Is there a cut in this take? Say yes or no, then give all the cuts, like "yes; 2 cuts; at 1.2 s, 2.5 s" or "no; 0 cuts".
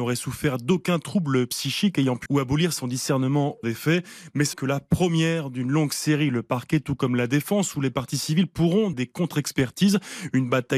yes; 4 cuts; at 2.3 s, 3.6 s, 4.5 s, 8.9 s